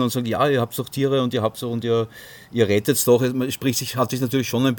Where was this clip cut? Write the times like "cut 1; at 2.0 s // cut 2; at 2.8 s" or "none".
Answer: none